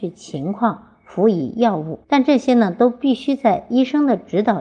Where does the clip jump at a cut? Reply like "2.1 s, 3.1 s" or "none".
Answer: 2.0 s